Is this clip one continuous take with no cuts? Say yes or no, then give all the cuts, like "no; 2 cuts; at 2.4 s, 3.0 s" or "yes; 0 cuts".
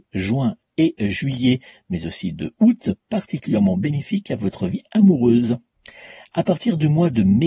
yes; 0 cuts